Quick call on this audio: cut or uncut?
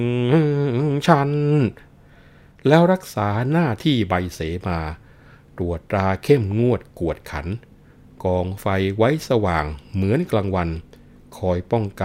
uncut